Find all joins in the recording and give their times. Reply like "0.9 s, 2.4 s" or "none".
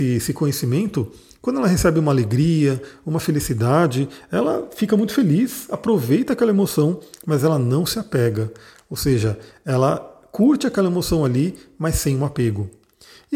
none